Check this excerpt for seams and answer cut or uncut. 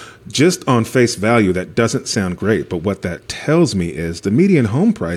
uncut